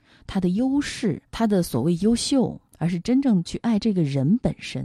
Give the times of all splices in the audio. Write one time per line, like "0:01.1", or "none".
0:01.3
0:02.7